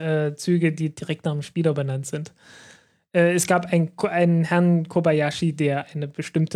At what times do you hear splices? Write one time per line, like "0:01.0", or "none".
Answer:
none